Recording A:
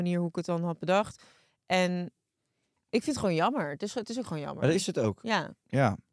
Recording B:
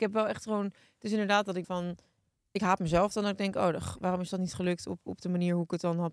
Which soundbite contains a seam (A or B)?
B